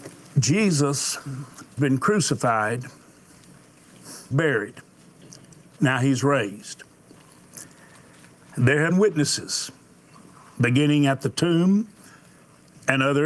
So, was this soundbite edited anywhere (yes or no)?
yes